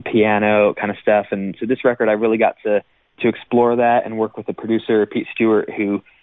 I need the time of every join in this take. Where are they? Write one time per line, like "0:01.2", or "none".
0:03.1